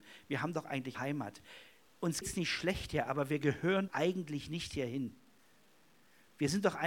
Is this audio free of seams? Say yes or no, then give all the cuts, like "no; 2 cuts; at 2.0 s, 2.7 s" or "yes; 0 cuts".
no; 3 cuts; at 0.9 s, 2.2 s, 3.9 s